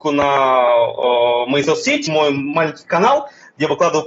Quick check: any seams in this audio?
yes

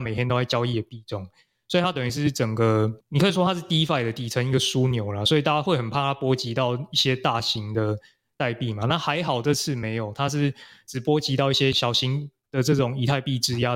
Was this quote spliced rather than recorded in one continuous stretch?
no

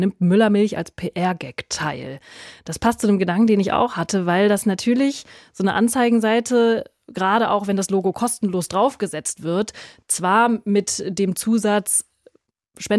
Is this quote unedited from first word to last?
yes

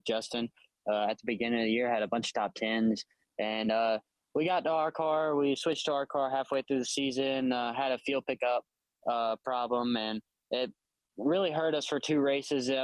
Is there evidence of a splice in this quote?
no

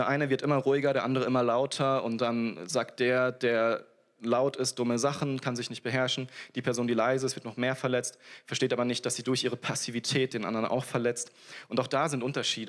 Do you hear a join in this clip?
no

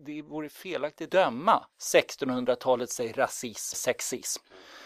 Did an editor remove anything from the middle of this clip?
yes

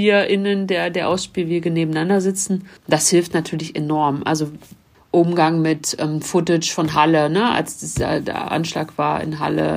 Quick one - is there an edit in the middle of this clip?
yes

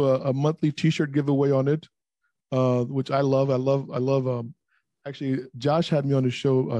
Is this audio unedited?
yes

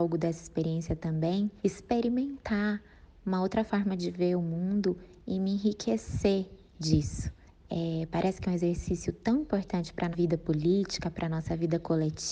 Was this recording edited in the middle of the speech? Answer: yes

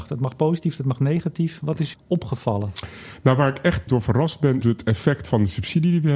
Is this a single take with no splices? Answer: no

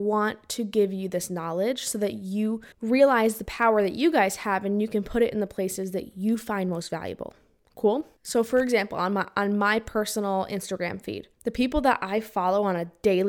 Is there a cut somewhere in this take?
yes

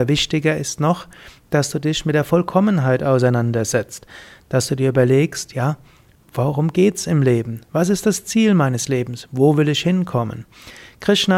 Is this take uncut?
yes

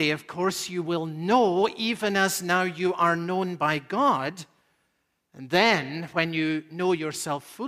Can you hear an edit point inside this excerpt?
no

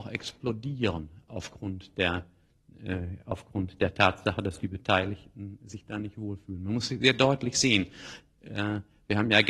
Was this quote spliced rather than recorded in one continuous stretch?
no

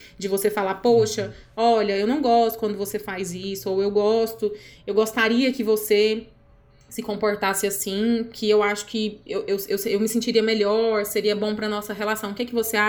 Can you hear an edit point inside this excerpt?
no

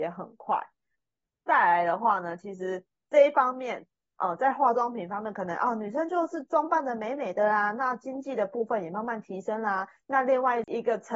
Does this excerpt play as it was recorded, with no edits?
yes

